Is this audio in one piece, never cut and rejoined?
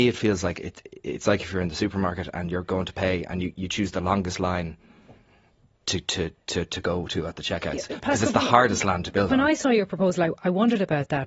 yes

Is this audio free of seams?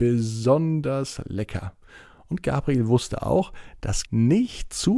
no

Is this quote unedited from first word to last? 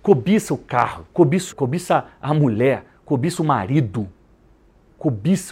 no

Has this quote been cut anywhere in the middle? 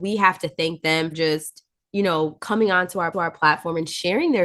yes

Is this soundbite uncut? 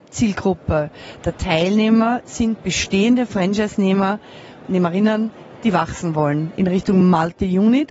yes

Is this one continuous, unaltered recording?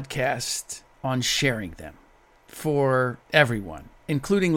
no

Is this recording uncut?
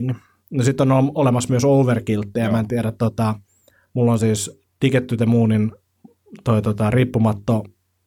yes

